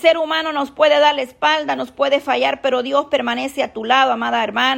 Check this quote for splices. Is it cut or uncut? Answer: uncut